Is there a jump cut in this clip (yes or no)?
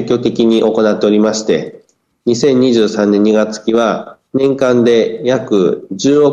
no